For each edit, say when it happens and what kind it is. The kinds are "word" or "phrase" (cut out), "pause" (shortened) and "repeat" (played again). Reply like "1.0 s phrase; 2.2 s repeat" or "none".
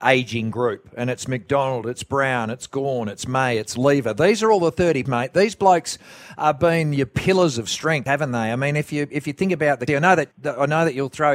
5.1 s word; 8.1 s word; 9.9 s word; 10.3 s pause